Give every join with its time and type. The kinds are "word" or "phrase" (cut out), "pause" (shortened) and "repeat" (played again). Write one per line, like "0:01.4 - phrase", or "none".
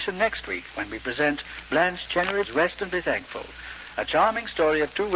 0:02.4 - word